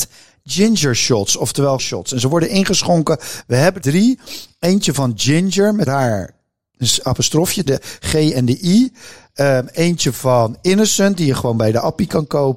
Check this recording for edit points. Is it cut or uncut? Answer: cut